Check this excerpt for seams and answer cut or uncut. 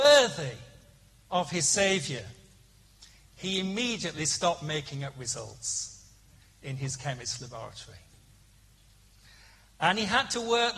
uncut